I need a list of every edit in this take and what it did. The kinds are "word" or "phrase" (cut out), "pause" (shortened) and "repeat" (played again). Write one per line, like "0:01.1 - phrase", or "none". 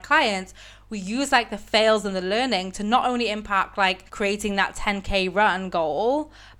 0:04.1 - pause